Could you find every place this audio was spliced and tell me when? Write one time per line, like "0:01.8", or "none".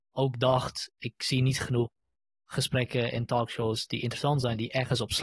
none